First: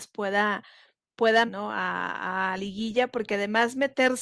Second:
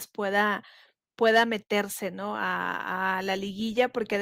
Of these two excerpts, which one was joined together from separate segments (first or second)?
first